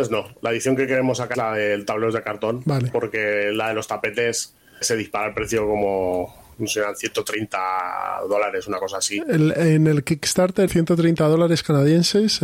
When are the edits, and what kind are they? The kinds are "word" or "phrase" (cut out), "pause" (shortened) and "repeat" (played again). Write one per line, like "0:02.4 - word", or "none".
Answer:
0:01.3 - word
0:04.8 - word
0:10.7 - word